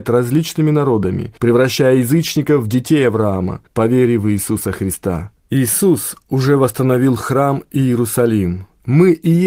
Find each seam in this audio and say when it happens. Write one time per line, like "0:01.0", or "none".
0:01.4
0:03.7
0:05.4